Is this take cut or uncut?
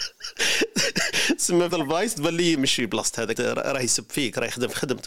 cut